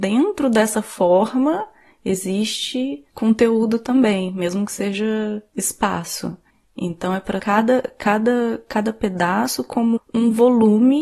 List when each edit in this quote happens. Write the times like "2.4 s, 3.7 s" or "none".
3.1 s, 6.5 s, 7.4 s, 10.0 s